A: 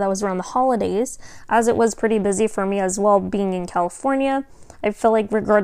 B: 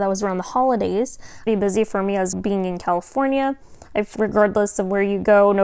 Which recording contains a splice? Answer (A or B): B